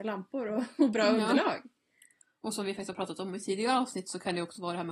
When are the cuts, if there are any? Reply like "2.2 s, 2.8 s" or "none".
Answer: none